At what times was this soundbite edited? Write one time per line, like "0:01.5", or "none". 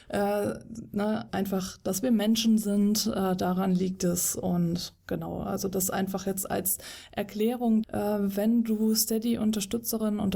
0:01.3
0:07.8